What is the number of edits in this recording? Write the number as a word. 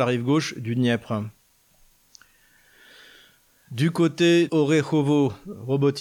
one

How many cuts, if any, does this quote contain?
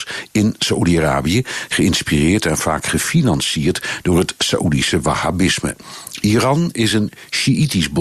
zero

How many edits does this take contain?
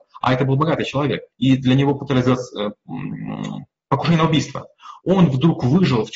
one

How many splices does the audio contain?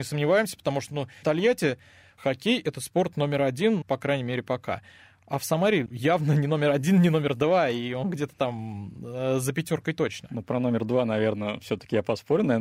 three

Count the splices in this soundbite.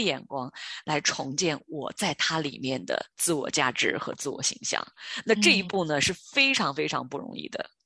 one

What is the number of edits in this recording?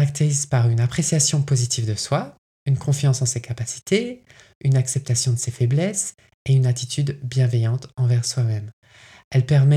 zero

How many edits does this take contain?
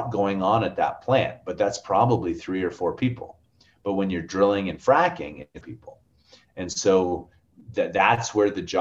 one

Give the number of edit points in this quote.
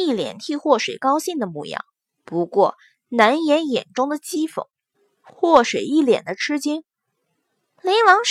one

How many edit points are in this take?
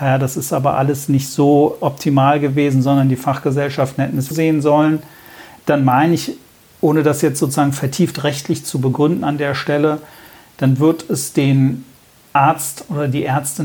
one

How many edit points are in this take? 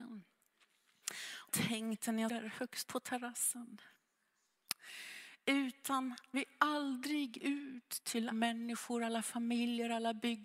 six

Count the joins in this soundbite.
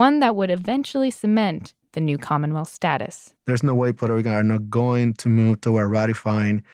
one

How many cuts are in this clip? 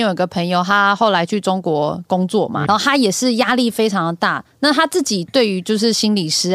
one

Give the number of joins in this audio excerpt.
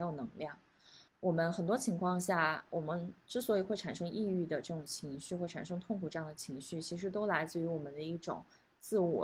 one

